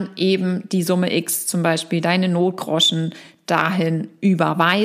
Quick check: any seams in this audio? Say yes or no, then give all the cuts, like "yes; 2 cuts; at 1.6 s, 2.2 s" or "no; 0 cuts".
no; 0 cuts